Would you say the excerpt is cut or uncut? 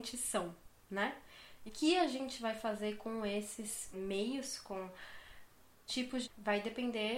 cut